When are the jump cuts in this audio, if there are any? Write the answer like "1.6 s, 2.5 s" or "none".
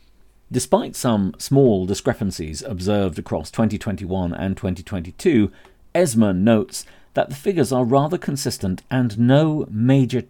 none